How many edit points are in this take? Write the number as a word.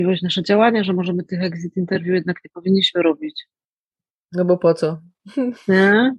zero